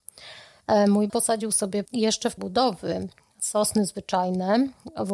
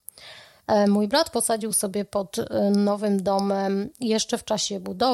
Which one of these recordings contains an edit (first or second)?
first